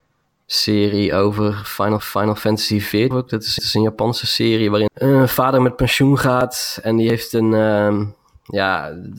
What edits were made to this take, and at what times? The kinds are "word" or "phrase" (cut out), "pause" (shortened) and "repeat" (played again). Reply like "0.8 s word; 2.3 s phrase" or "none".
2.0 s repeat; 3.1 s word; 3.6 s repeat; 4.9 s word